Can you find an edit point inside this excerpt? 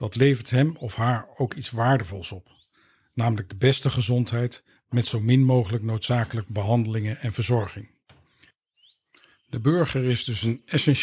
no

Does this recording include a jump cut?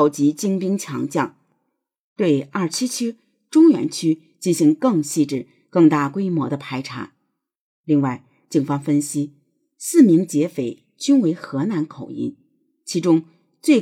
no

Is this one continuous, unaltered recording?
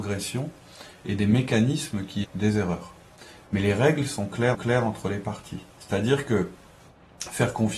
no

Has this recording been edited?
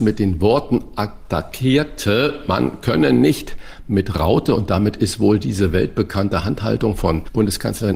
no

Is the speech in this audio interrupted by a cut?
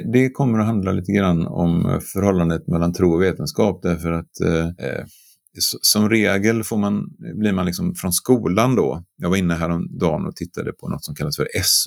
yes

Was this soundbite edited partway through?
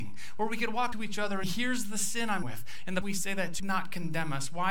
yes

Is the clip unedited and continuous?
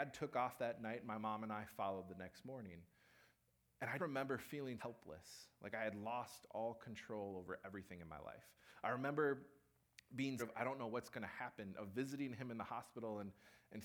no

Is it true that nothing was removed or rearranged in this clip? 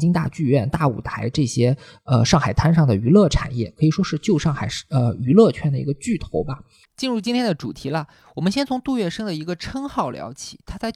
yes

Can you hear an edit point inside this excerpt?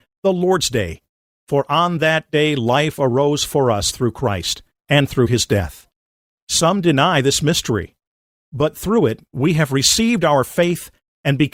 no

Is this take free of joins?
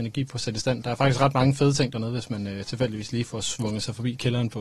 yes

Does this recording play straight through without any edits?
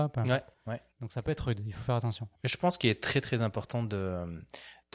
no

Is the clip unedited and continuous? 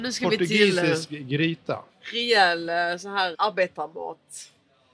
no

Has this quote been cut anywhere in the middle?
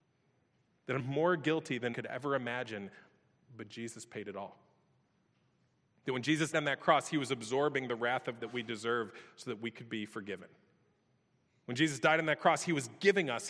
yes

